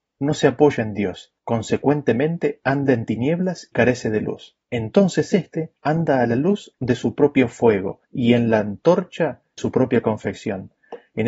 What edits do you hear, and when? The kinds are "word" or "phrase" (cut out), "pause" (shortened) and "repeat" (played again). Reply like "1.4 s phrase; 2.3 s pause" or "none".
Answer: 1.4 s pause; 3.7 s word; 4.6 s pause; 5.8 s pause; 8.0 s pause; 9.6 s word